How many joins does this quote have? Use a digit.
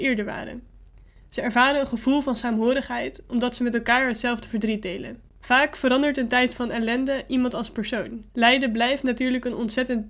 2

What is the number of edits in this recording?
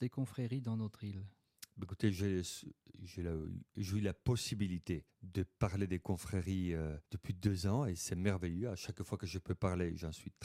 2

